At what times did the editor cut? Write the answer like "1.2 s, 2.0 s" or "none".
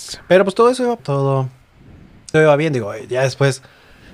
1.0 s, 2.3 s